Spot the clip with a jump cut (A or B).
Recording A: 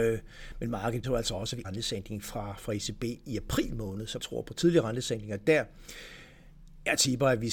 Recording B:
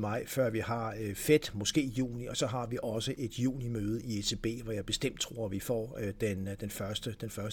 A